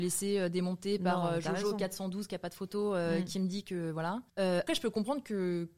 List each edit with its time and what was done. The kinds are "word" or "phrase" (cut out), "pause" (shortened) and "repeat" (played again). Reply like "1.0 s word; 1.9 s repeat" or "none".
4.7 s word